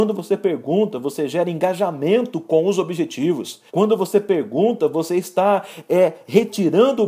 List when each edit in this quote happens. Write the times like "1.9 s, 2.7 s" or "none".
3.7 s

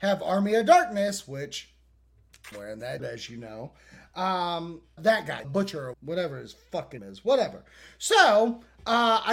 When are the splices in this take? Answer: 2.5 s, 3.0 s, 5.0 s, 5.4 s, 5.9 s, 7.0 s

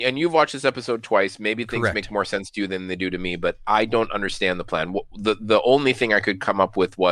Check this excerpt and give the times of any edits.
none

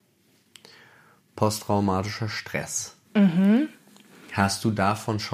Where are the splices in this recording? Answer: none

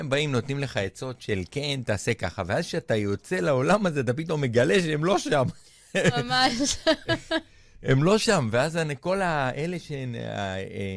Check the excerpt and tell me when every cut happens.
none

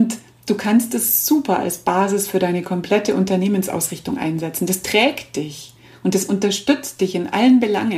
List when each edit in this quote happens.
none

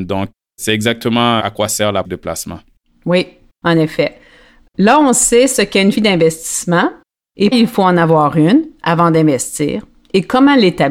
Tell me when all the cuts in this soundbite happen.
1.4 s, 2.0 s, 5.9 s, 7.5 s

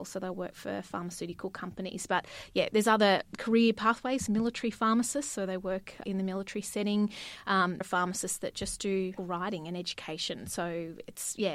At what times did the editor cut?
3.2 s, 4.3 s, 6.0 s, 7.8 s, 9.2 s

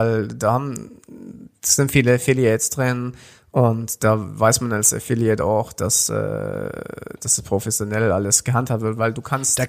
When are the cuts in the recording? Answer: none

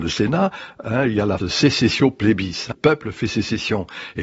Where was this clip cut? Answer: 1.4 s, 2.7 s

